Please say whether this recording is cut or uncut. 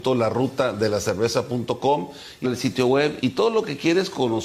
cut